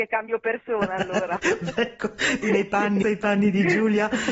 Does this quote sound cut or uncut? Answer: cut